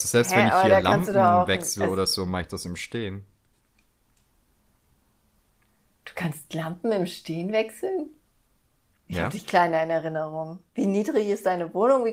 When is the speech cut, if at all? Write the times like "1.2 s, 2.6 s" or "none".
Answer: none

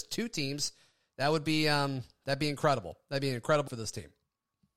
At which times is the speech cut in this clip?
3.7 s

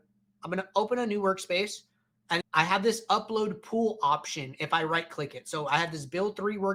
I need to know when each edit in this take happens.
2.4 s

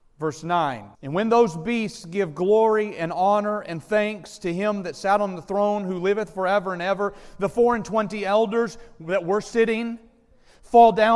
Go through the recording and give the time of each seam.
0.9 s

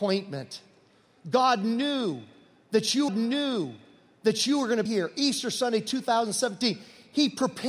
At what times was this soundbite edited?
3.1 s, 4.9 s

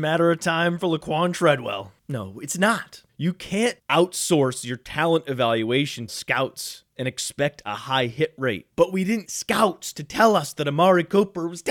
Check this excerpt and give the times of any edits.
3.8 s, 6.1 s, 8.7 s, 9.2 s

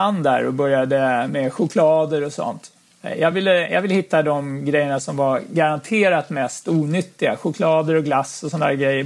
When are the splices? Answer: none

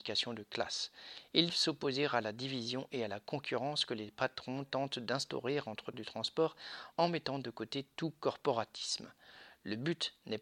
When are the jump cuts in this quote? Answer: 1.5 s, 5.9 s

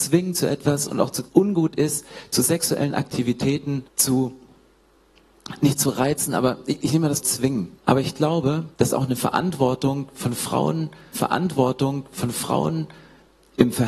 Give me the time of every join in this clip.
1.3 s, 3.9 s, 7.2 s, 7.8 s, 8.7 s, 11.1 s

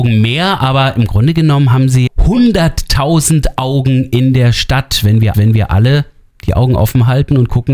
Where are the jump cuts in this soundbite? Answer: 2.1 s, 5.3 s

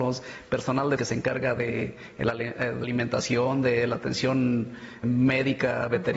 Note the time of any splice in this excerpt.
1.0 s, 2.8 s, 5.0 s

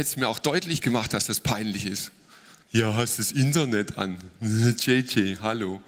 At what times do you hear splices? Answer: 2.6 s

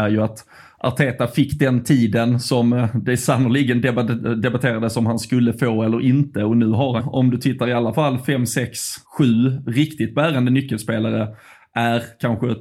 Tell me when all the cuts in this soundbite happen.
7.0 s, 9.0 s

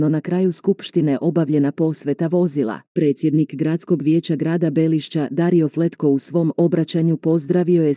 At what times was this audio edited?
2.9 s

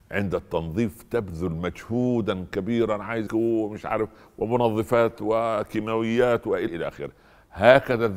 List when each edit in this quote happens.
3.3 s, 6.7 s

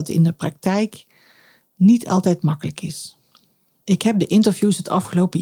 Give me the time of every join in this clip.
none

